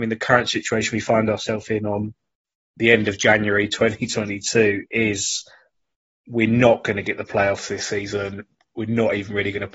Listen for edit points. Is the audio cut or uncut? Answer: uncut